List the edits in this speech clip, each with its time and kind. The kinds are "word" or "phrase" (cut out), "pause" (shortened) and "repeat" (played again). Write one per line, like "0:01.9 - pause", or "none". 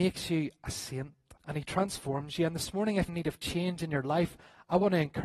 0:01.4 - pause
0:03.1 - word